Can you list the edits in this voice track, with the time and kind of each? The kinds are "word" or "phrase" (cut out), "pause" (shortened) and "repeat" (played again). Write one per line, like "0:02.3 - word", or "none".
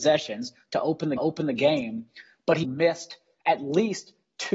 0:01.2 - repeat
0:02.6 - word